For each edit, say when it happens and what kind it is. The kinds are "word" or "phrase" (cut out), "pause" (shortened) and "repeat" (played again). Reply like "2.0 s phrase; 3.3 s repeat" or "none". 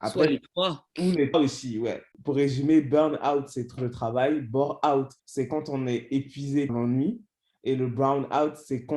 0.9 s pause; 1.3 s word; 2.1 s pause; 3.8 s phrase; 5.2 s pause; 6.7 s word